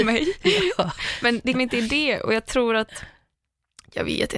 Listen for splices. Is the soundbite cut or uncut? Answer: cut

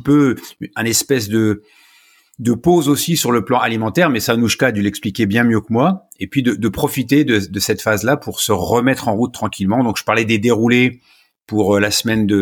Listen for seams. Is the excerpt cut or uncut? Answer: uncut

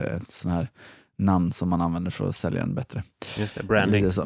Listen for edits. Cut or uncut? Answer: uncut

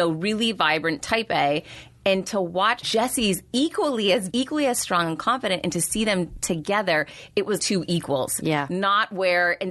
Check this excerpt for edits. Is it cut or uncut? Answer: cut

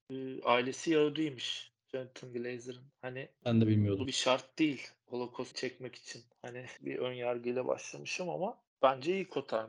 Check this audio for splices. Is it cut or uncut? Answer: cut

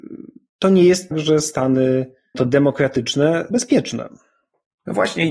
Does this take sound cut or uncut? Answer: cut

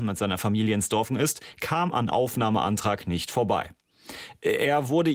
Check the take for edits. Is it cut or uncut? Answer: cut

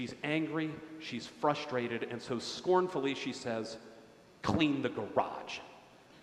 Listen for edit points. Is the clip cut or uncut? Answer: uncut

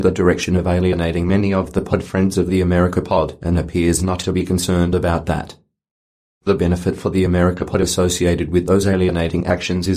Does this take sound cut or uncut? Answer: uncut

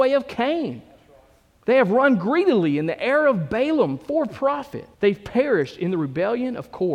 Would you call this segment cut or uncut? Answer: cut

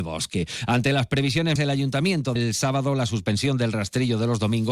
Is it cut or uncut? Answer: cut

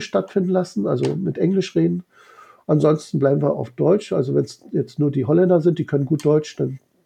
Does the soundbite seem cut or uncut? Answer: uncut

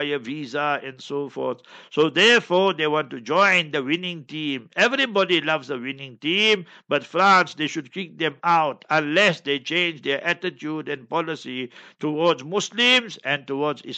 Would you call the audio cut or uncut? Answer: uncut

